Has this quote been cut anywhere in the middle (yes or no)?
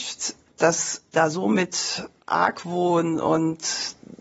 yes